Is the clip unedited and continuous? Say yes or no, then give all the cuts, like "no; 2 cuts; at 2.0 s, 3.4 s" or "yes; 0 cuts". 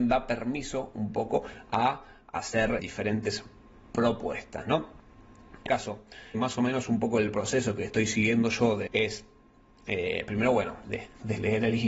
no; 5 cuts; at 2.8 s, 5.7 s, 6.3 s, 8.9 s, 10.8 s